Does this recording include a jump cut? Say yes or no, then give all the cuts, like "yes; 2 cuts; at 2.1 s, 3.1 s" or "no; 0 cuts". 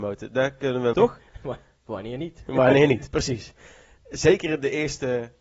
yes; 1 cut; at 0.9 s